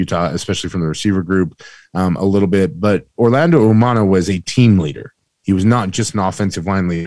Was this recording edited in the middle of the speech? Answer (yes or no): no